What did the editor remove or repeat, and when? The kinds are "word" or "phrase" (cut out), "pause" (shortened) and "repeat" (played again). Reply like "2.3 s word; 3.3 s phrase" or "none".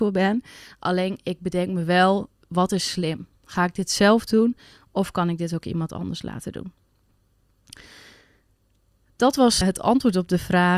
9.6 s word